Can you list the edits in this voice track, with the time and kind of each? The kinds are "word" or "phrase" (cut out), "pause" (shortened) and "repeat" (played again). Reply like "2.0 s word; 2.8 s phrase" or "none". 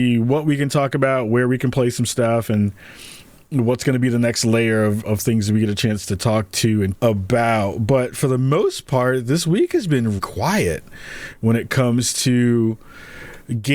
5.0 s word; 6.9 s word; 10.2 s word